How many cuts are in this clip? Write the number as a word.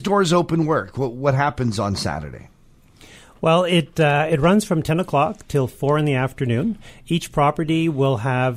zero